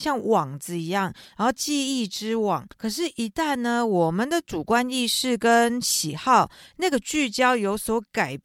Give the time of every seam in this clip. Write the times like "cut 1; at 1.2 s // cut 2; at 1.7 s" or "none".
cut 1; at 2.7 s